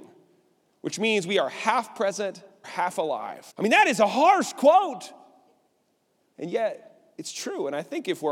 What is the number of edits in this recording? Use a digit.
2